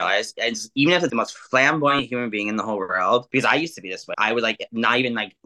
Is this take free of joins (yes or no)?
no